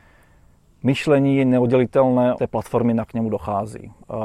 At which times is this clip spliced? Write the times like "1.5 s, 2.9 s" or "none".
2.4 s, 3.1 s